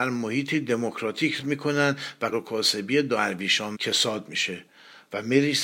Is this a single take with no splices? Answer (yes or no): no